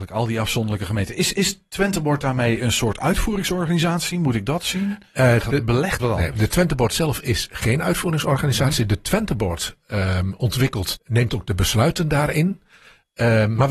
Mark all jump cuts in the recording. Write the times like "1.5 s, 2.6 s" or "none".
5.4 s, 6.0 s, 11.0 s